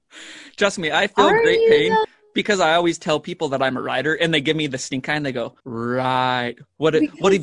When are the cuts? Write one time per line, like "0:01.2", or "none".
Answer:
0:05.6